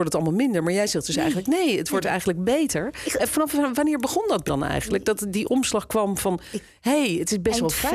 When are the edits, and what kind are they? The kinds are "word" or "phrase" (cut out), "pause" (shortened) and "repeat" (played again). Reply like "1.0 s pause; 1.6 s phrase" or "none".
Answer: 3.3 s word; 4.5 s word